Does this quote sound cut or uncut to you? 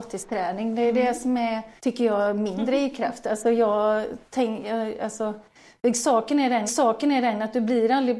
cut